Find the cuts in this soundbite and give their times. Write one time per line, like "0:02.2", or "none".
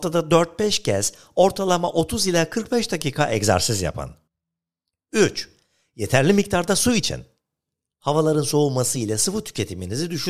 none